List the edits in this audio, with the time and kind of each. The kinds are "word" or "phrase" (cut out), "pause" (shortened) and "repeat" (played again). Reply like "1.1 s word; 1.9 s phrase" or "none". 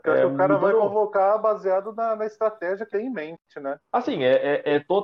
2.9 s word